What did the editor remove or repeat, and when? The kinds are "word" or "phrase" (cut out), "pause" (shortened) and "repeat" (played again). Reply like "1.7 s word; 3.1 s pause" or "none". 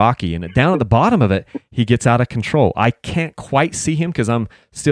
none